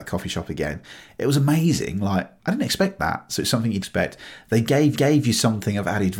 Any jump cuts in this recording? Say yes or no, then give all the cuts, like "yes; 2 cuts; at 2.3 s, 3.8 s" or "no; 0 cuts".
yes; 3 cuts; at 2.4 s, 3.8 s, 4.9 s